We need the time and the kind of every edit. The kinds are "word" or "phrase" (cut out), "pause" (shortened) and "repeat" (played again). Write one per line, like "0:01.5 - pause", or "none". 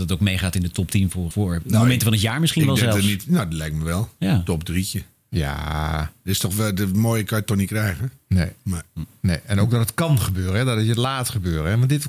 0:01.3 - word